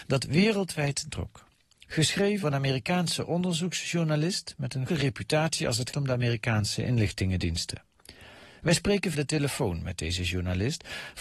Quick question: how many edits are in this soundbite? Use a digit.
5